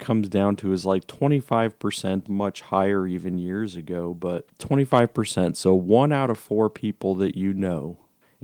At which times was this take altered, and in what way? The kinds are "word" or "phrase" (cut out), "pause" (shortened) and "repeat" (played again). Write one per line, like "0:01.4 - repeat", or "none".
0:02.3 - phrase
0:04.5 - word